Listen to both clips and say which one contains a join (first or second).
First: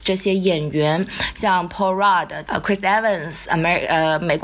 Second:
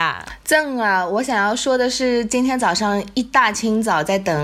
first